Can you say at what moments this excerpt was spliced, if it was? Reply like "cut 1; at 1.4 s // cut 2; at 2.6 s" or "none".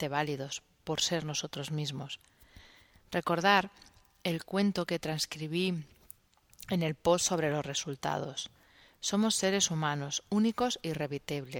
none